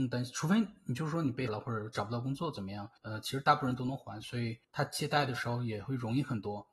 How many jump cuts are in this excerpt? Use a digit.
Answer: 3